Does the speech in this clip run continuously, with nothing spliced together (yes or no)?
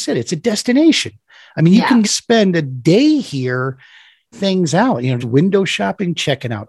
no